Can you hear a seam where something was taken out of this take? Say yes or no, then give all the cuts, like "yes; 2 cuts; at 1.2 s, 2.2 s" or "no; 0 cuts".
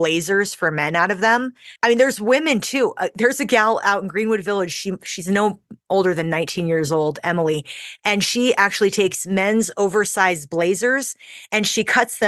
yes; 1 cut; at 1.8 s